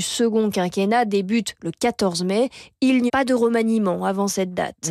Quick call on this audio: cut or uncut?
cut